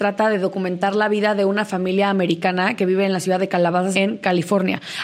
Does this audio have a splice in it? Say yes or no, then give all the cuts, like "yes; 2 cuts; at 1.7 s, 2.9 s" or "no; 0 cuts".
yes; 1 cut; at 3.9 s